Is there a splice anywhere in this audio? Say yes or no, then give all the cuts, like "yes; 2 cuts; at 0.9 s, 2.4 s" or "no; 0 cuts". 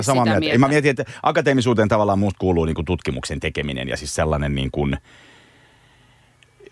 no; 0 cuts